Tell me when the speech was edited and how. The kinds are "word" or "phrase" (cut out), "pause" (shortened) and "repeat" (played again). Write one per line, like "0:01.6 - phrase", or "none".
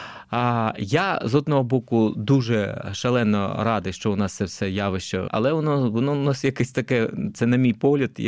0:05.3 - word